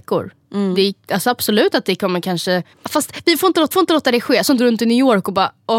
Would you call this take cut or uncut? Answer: cut